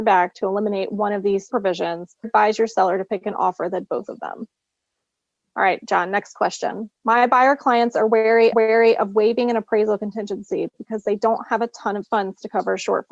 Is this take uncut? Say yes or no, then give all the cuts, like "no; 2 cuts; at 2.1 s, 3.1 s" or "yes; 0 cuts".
no; 6 cuts; at 1.5 s, 2.2 s, 3.9 s, 7.0 s, 8.5 s, 12.0 s